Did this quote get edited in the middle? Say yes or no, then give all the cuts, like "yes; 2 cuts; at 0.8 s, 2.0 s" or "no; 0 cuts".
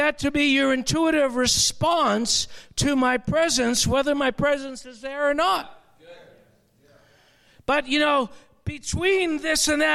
no; 0 cuts